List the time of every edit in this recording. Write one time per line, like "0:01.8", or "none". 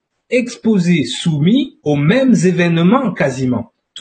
0:01.8